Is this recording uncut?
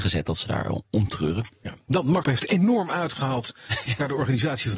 no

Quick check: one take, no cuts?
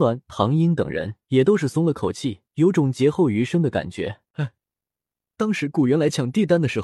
no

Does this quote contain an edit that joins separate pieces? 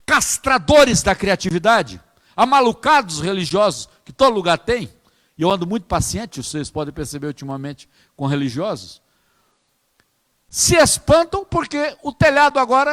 no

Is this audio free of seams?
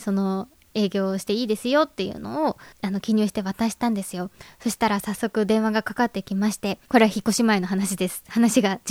no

